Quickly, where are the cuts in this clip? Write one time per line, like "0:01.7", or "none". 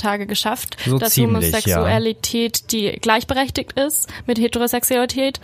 none